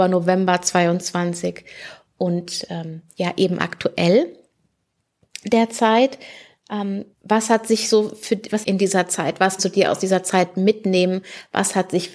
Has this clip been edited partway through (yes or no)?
yes